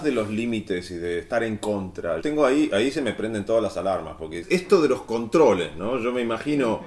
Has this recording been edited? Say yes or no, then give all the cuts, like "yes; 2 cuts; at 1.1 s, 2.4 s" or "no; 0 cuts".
yes; 1 cut; at 2.2 s